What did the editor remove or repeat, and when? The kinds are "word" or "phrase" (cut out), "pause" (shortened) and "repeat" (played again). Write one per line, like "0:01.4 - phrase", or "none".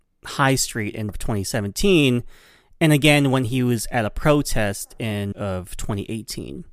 0:01.1 - word
0:05.3 - word